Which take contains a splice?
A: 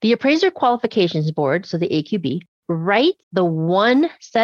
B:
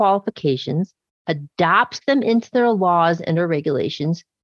A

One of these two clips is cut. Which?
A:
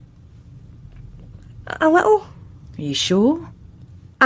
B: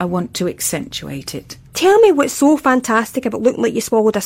B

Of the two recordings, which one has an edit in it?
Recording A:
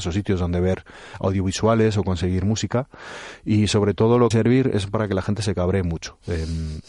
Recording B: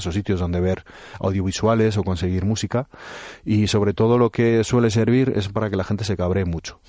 A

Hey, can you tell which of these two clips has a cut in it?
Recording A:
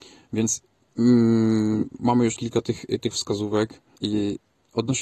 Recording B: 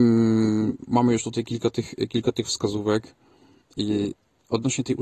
A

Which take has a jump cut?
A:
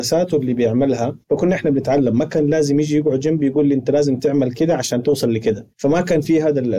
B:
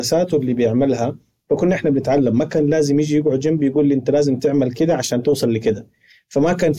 A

